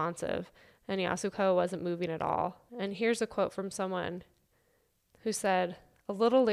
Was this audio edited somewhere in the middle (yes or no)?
yes